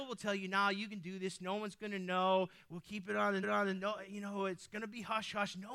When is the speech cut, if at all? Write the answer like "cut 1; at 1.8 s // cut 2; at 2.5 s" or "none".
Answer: cut 1; at 3.4 s